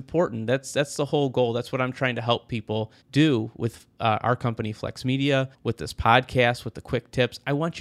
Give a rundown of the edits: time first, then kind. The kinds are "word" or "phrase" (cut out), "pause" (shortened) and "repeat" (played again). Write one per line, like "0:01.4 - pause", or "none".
0:03.0 - pause
0:05.5 - pause